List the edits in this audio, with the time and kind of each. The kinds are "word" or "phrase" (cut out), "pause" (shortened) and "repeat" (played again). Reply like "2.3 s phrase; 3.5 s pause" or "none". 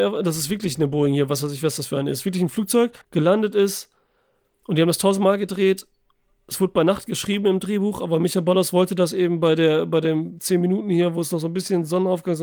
3.0 s pause